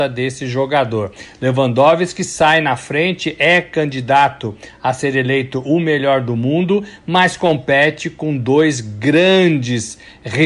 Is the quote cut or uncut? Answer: uncut